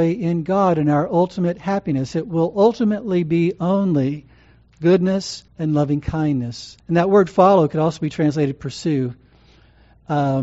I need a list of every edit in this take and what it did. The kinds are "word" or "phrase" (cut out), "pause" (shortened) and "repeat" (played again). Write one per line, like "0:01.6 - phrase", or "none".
0:05.5 - pause
0:06.8 - pause